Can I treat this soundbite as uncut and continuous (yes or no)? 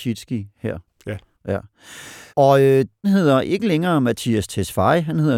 no